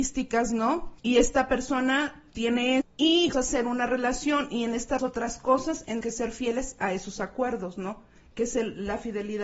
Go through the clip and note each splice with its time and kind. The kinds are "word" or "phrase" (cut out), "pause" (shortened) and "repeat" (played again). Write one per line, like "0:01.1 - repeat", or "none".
0:01.0 - pause
0:02.8 - word
0:03.3 - phrase
0:05.0 - phrase
0:06.0 - phrase